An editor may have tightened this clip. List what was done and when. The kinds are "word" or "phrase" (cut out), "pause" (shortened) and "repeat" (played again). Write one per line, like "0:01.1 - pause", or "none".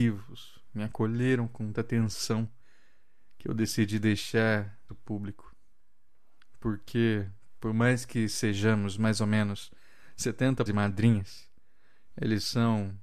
0:01.7 - word
0:04.9 - phrase
0:10.7 - word